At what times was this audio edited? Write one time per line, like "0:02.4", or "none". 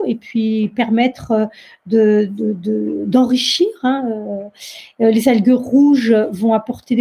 none